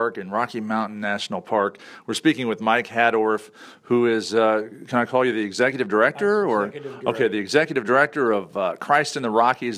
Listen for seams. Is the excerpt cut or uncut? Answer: uncut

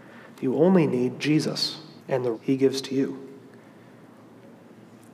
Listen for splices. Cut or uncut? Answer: cut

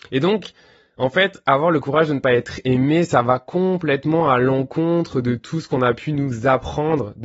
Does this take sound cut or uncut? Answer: uncut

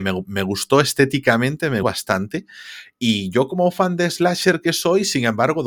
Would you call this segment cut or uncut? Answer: cut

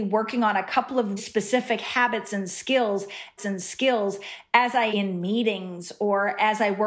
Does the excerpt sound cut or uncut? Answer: cut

